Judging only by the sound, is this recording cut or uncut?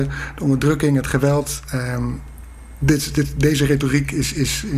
cut